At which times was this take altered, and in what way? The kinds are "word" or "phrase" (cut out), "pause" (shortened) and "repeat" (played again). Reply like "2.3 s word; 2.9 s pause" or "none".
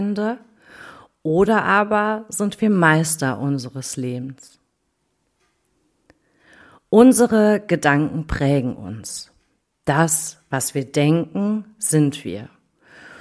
none